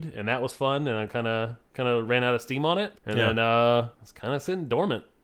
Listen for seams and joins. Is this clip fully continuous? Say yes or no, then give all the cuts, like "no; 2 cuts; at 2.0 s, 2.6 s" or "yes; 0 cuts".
no; 2 cuts; at 3.0 s, 3.9 s